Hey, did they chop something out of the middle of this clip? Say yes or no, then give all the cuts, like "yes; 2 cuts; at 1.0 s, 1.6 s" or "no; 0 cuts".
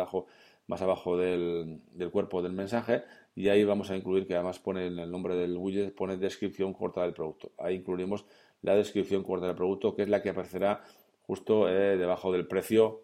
no; 0 cuts